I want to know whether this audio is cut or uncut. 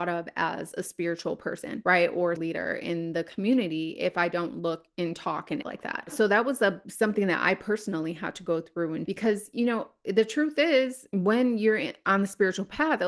cut